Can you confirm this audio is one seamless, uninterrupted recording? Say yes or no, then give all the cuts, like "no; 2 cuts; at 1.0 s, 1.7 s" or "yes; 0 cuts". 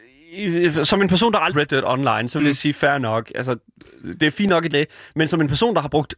no; 2 cuts; at 1.5 s, 4.7 s